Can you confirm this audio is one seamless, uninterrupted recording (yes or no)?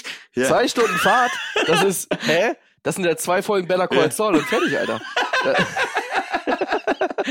yes